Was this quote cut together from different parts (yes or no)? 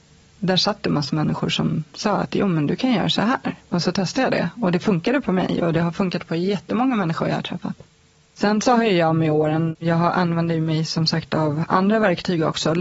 no